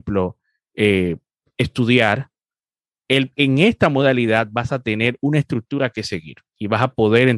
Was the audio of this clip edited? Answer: no; 0 cuts

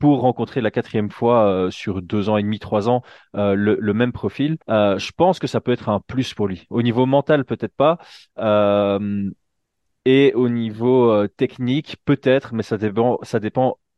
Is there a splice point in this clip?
yes; 1 cut; at 4.6 s

